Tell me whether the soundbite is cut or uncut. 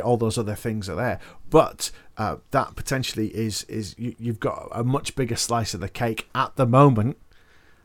uncut